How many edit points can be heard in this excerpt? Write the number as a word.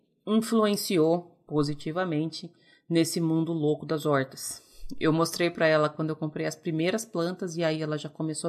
zero